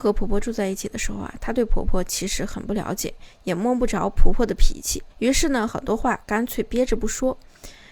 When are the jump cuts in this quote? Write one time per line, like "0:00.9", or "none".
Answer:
0:05.1